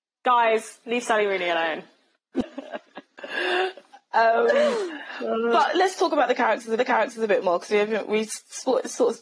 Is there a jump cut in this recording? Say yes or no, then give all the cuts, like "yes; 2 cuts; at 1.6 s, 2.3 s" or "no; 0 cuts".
yes; 1 cut; at 6.8 s